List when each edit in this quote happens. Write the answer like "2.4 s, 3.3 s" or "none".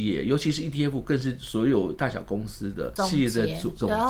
none